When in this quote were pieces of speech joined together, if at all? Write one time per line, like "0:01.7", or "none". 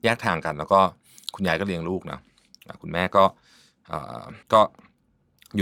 0:04.4